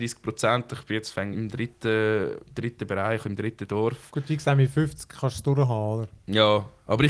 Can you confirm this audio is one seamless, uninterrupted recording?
no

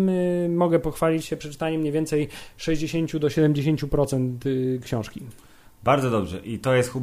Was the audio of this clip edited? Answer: no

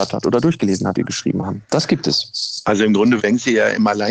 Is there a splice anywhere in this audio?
yes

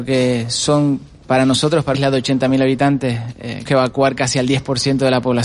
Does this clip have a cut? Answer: yes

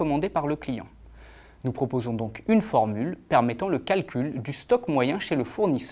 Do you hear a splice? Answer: no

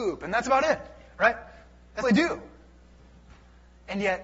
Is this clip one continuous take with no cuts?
no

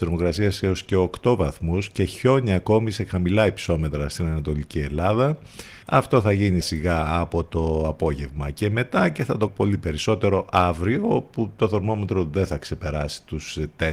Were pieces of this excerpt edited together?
yes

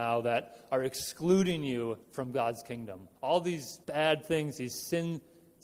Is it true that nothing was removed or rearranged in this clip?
no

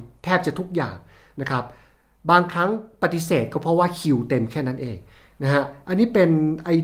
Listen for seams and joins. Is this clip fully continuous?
yes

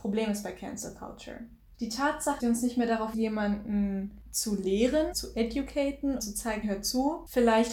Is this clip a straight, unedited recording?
no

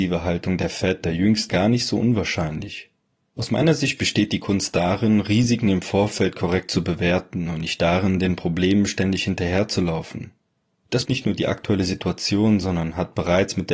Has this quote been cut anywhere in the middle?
yes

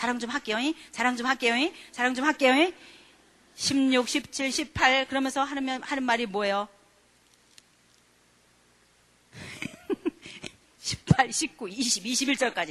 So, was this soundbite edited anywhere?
no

